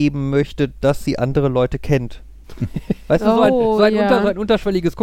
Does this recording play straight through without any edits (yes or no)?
no